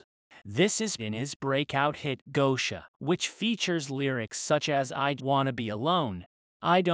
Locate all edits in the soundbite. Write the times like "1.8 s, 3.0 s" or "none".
1.0 s, 2.9 s, 5.2 s